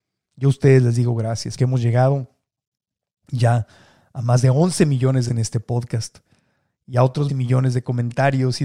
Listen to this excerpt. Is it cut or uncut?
cut